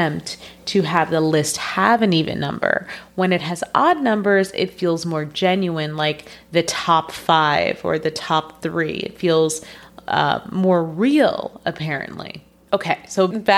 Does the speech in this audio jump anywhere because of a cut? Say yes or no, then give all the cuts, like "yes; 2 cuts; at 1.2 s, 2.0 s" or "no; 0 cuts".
no; 0 cuts